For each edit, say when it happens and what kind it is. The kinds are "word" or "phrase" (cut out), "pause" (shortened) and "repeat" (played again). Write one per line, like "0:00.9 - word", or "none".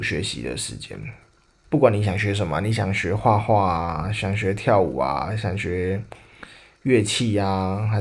none